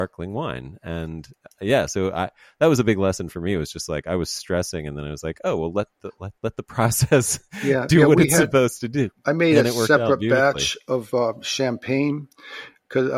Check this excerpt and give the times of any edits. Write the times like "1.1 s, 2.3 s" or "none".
6.4 s